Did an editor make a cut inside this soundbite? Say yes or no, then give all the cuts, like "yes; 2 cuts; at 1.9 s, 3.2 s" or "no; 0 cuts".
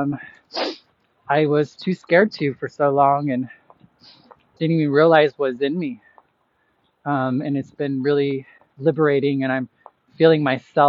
no; 0 cuts